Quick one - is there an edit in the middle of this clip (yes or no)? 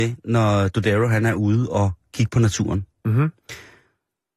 no